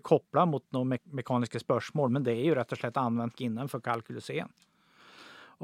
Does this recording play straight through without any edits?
no; 1 cut; at 3.4 s

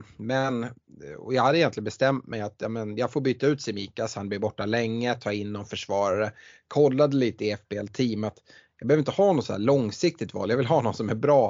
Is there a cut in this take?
no; 0 cuts

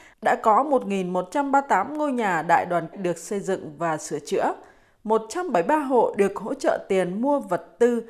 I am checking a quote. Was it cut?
yes; 1 cut; at 2.9 s

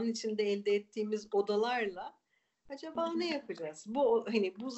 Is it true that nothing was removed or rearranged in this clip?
yes; 0 cuts

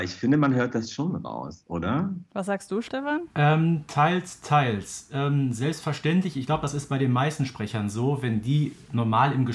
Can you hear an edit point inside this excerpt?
yes; 1 cut; at 3.3 s

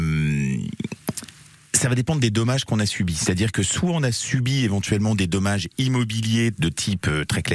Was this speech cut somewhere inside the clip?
no; 0 cuts

